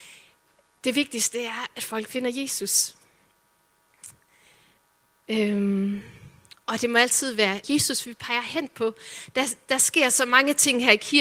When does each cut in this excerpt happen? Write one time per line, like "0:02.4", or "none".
0:07.6